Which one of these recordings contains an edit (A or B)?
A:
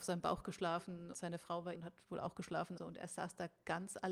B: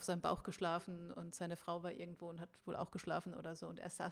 A